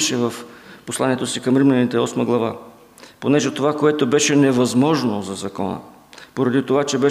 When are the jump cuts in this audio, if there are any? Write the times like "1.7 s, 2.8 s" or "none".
none